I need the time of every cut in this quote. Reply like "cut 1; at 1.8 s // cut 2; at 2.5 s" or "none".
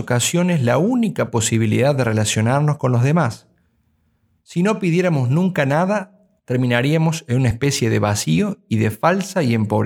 none